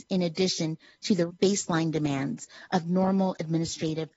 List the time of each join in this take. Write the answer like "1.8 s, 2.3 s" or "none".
1.3 s